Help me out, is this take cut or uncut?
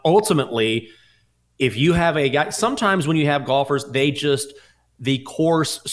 uncut